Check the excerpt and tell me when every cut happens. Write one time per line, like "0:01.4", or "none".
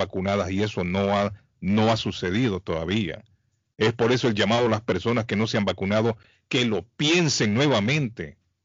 none